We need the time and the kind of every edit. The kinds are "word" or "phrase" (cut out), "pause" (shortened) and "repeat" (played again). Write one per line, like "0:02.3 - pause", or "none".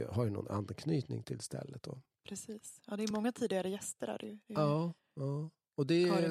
none